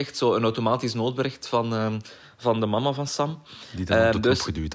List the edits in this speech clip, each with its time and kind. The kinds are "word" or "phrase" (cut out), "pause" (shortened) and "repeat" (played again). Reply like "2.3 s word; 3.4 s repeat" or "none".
none